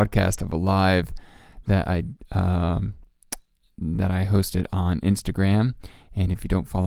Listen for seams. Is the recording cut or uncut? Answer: uncut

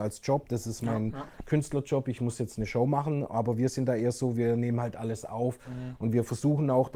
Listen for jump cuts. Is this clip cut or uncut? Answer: uncut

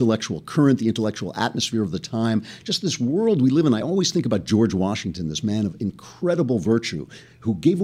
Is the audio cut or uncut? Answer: uncut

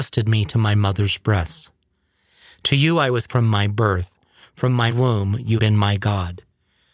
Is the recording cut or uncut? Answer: cut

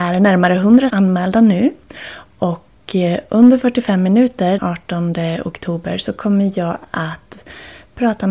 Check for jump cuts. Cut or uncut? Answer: cut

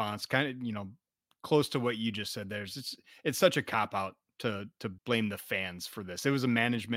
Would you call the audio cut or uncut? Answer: cut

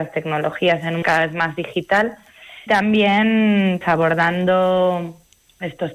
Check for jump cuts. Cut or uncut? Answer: cut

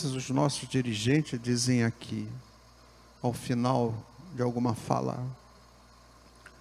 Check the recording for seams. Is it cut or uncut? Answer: uncut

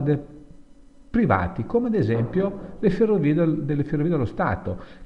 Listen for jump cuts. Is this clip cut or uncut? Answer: uncut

